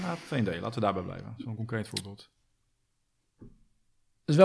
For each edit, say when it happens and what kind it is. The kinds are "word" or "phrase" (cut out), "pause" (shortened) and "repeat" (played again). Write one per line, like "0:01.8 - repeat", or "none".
none